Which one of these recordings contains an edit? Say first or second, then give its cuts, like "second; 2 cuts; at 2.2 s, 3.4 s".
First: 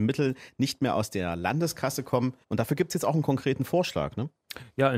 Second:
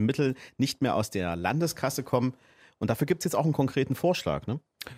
first; 1 cut; at 2.4 s